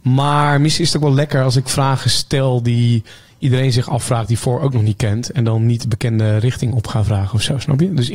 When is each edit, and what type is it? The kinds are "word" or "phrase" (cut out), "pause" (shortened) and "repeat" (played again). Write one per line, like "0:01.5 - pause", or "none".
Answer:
none

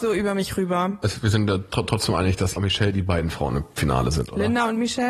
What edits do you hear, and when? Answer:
0:02.6 - word

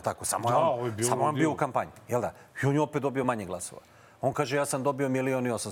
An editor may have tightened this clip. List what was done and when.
none

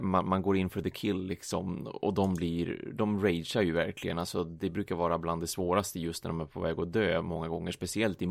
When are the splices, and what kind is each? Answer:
none

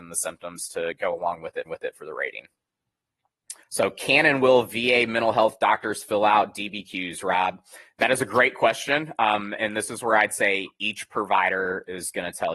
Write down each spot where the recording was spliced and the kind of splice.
0:01.6 - repeat
0:03.6 - pause
0:09.6 - word

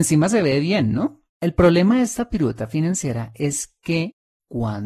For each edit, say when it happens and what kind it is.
0:01.3 - pause

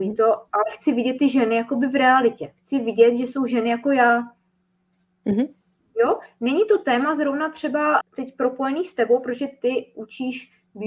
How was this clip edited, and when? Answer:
0:08.0 - word

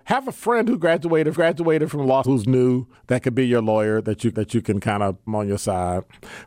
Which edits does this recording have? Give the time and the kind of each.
0:01.3 - repeat
0:02.2 - word
0:03.0 - pause
0:04.3 - repeat
0:05.3 - phrase

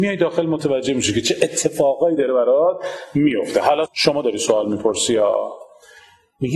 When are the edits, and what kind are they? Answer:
0:03.9 - word

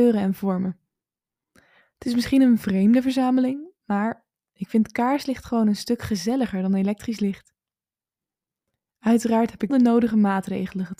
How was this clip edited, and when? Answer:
0:09.7 - word

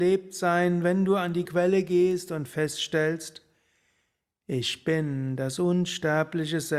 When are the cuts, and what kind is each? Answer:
0:01.5 - word

